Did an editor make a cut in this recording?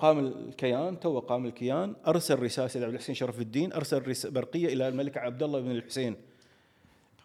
no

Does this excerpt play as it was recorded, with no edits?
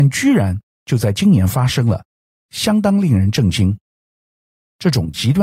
yes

